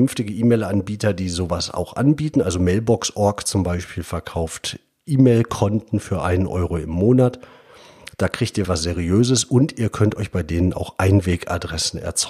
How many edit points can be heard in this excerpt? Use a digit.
1